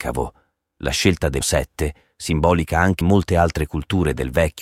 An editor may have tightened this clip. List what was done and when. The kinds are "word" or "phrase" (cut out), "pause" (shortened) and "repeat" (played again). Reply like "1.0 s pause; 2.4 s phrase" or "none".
1.4 s word; 3.0 s word